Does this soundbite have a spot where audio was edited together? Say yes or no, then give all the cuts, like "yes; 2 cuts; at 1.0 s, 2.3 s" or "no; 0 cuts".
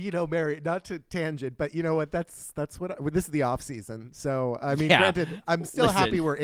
no; 0 cuts